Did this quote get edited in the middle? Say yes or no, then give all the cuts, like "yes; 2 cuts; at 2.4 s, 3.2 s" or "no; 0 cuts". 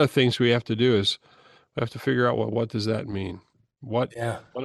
no; 0 cuts